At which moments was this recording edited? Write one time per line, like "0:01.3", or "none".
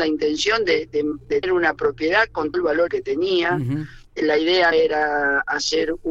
0:01.4
0:02.5
0:02.9
0:04.1
0:04.7

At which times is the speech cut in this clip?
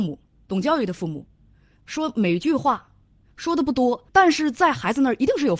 0:04.1

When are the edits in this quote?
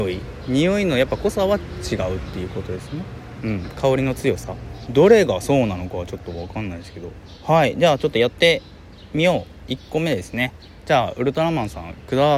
0:04.9

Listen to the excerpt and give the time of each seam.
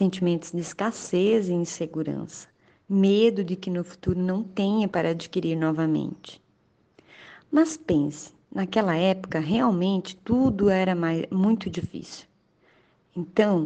0:08.4

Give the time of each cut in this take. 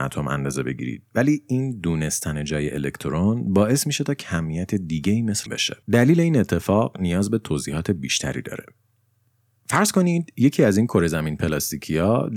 0:05.5
0:05.8

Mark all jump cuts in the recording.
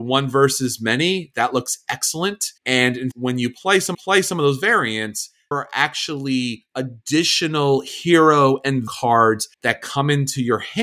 0:02.6
0:03.1
0:03.9
0:05.5
0:08.9
0:09.5

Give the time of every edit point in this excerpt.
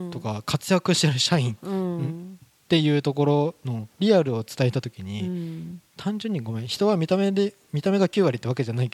0:03.9

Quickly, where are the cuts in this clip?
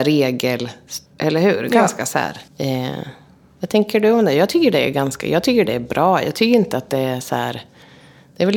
0:01.1
0:02.5

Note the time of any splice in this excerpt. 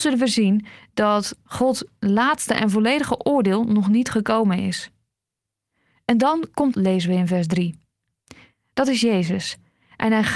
0:06.7

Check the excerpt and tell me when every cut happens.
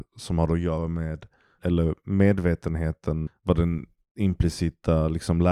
0:01.6
0:03.3

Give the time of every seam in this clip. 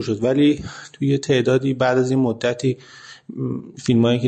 none

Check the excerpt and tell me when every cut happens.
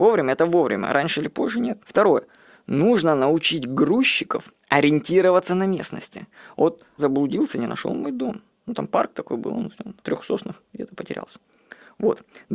0:01.8
0:07.0
0:10.0

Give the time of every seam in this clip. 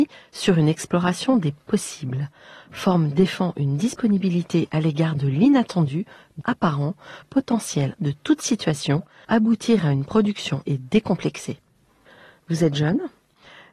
0:04.7
0:06.4
0:07.2
0:08.0
0:09.2
0:10.6

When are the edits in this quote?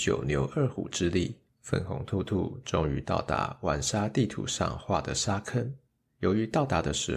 0:01.5
0:05.9

